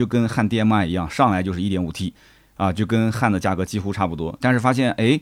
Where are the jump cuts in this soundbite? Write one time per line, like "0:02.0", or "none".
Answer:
none